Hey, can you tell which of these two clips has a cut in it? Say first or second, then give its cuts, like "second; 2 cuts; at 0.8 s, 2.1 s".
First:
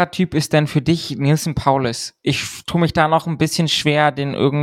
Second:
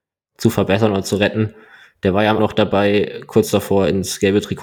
second; 1 cut; at 2.4 s